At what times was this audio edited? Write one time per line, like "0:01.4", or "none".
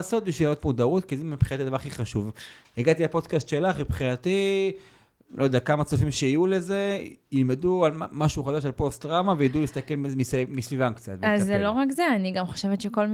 none